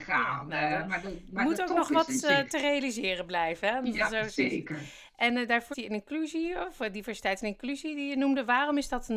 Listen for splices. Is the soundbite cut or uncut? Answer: cut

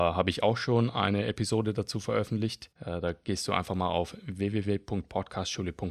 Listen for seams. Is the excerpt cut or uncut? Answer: cut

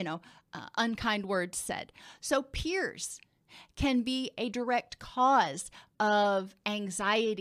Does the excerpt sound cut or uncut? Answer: uncut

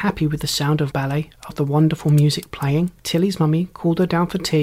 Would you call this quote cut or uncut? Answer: cut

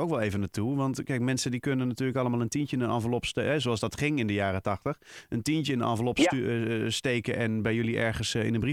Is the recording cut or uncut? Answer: uncut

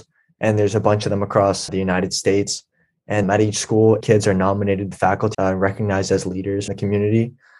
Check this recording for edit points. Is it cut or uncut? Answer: cut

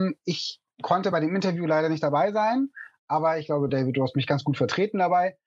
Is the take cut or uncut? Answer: uncut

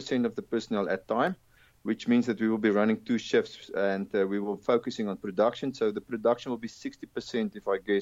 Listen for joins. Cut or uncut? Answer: uncut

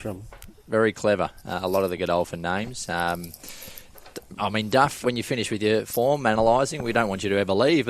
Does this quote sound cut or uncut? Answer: cut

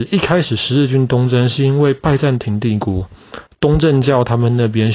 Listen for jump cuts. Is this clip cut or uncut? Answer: uncut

